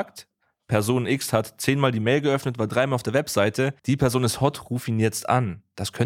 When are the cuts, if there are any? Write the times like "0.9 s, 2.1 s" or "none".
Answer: 3.8 s